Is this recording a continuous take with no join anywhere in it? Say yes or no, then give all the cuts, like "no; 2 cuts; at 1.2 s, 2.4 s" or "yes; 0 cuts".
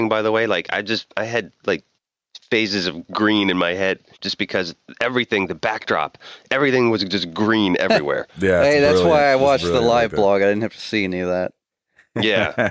yes; 0 cuts